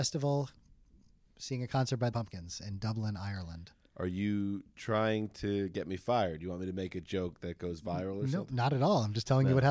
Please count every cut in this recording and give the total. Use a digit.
1